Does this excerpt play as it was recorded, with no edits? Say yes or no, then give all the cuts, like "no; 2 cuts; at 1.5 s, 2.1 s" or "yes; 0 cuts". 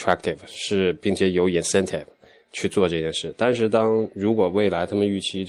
yes; 0 cuts